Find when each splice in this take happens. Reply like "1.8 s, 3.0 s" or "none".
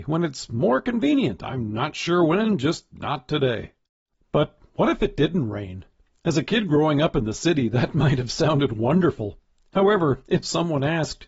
none

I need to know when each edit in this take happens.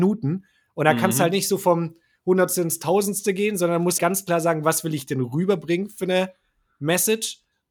4.0 s

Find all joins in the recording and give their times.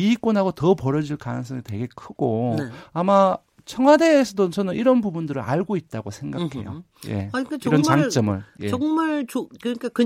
none

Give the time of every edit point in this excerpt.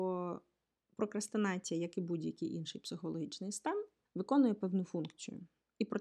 4.1 s

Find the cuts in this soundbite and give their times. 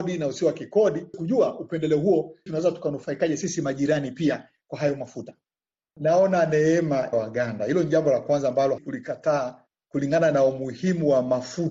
1.1 s, 2.5 s, 7.1 s, 8.8 s

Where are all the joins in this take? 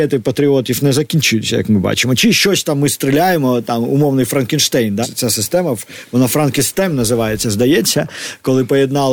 5.0 s

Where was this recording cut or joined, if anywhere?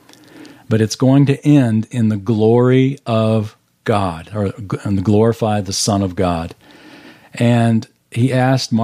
none

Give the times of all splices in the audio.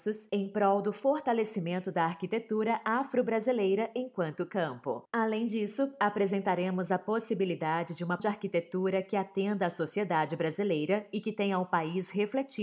8.2 s

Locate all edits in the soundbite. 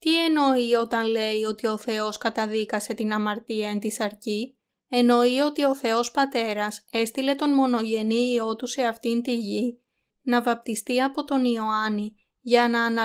4.7 s

